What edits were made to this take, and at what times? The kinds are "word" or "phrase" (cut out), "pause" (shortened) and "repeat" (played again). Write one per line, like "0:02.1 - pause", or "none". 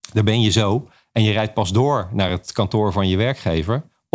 none